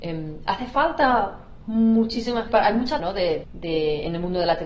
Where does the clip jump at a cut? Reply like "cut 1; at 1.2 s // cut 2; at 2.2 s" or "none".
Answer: cut 1; at 2.5 s // cut 2; at 3.0 s // cut 3; at 3.4 s